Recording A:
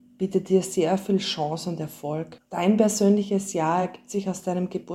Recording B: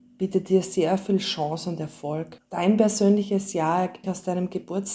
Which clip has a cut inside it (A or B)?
B